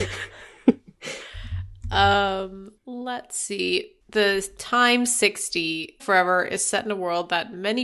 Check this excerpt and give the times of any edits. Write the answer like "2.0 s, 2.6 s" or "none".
2.8 s, 4.0 s, 6.0 s

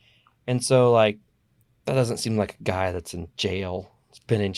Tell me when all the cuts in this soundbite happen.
1.6 s

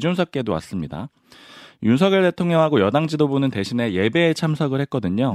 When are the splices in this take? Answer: none

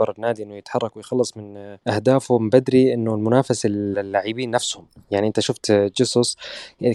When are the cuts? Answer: 1.8 s, 3.9 s

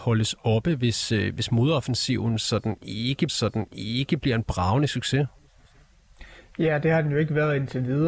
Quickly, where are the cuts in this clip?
3.3 s

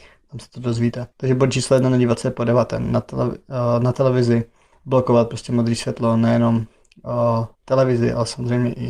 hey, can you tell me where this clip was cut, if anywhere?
1.1 s, 7.5 s

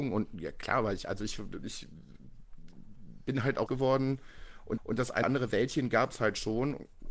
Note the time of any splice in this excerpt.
1.6 s, 3.7 s, 4.8 s, 5.2 s

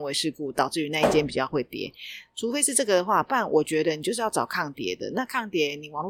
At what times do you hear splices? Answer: none

